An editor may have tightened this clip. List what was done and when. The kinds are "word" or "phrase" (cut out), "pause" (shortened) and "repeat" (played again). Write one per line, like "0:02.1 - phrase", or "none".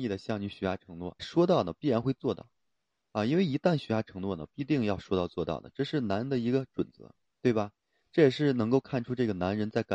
0:01.2 - word
0:07.3 - pause